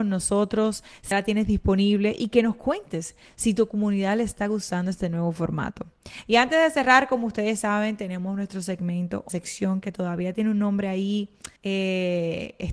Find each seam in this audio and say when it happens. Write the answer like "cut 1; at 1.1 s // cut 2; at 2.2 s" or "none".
cut 1; at 1.1 s // cut 2; at 9.3 s // cut 3; at 11.6 s